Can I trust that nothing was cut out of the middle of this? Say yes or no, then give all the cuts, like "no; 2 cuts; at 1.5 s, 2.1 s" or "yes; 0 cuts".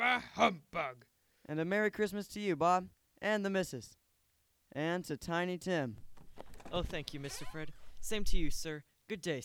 yes; 0 cuts